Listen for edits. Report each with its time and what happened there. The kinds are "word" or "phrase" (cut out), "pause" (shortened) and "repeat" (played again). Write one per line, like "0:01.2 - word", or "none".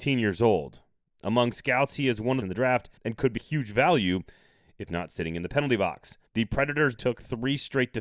0:02.4 - phrase
0:03.0 - pause
0:03.4 - word
0:04.9 - word
0:06.3 - pause
0:07.0 - word